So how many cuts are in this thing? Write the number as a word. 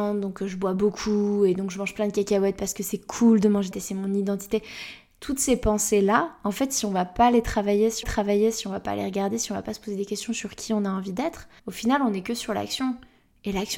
three